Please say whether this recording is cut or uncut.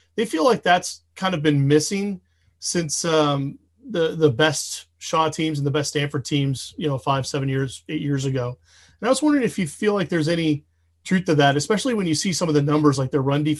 uncut